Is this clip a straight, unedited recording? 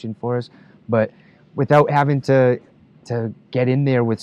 yes; 0 cuts

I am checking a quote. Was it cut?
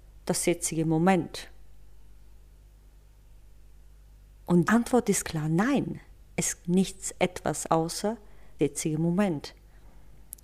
yes; 5 cuts; at 4.7 s, 5.2 s, 6.6 s, 7.7 s, 8.6 s

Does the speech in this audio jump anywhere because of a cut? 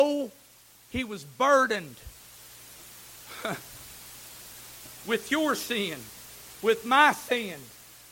no; 0 cuts

